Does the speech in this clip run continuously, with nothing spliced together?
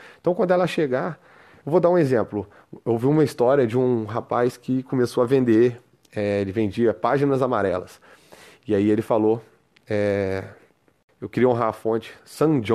yes; 0 cuts

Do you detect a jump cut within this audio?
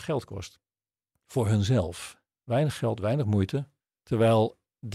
yes; 1 cut; at 3.8 s

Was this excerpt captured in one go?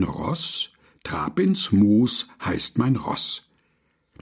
yes; 0 cuts

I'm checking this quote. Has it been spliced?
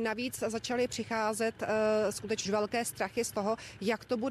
yes; 1 cut; at 2.4 s

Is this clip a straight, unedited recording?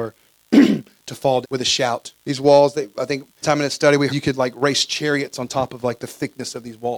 no; 4 cuts; at 1.4 s, 2.2 s, 3.4 s, 4.1 s

